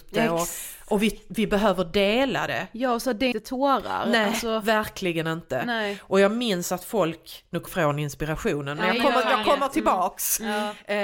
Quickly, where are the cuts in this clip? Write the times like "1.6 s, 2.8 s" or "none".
3.3 s, 7.7 s